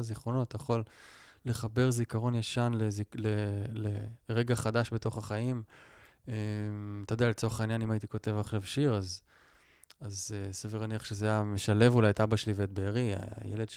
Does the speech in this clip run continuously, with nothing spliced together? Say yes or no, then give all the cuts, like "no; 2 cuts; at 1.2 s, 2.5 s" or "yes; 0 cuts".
yes; 0 cuts